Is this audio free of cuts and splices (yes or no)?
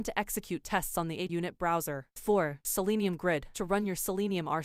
no